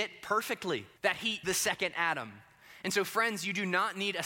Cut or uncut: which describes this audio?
cut